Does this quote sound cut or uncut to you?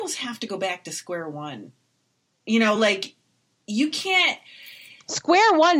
uncut